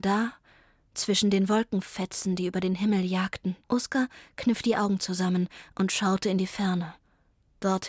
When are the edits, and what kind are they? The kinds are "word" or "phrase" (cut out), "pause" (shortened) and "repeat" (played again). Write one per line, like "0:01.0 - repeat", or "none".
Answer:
0:03.6 - pause